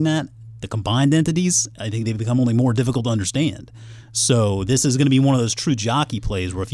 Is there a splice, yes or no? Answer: no